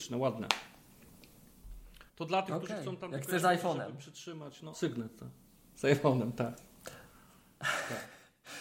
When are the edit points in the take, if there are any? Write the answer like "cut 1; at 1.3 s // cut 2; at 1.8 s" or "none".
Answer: cut 1; at 2.1 s // cut 2; at 3.4 s // cut 3; at 4.7 s